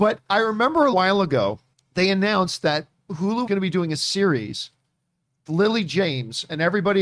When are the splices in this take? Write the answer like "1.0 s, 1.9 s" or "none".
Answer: 0.9 s, 1.7 s, 3.5 s, 5.5 s

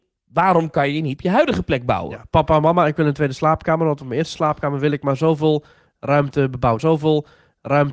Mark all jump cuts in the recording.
1.2 s, 6.8 s

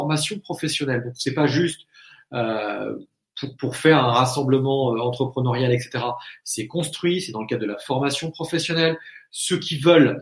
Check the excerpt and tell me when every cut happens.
none

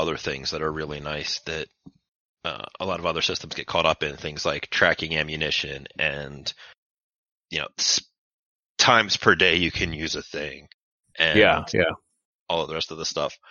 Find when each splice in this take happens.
none

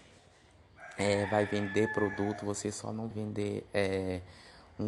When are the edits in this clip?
3.1 s

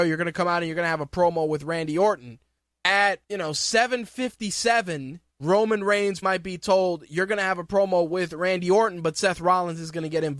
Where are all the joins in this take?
3.2 s, 5.3 s, 6.2 s

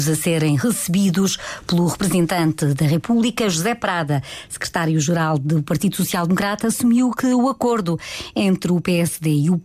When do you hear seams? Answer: none

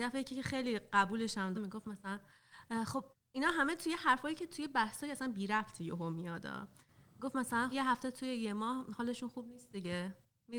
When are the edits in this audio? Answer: 1.5 s, 3.1 s, 7.7 s

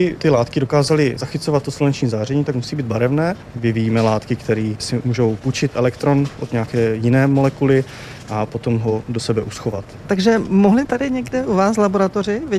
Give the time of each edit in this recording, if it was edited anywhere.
10.8 s

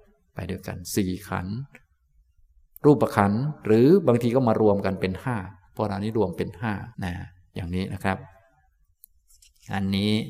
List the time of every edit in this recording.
6.9 s

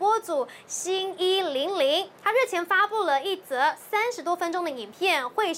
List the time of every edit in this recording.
2.2 s

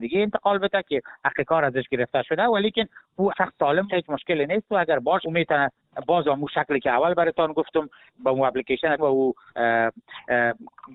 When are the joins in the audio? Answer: 3.3 s, 3.9 s, 5.2 s, 9.0 s

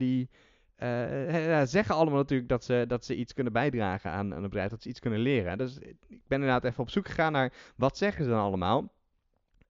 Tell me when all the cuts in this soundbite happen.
none

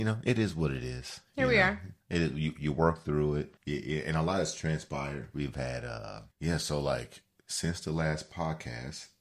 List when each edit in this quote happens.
2.0 s, 3.6 s, 6.3 s

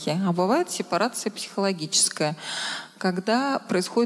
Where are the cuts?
none

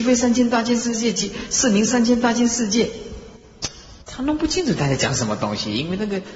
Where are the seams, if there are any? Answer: 4.0 s

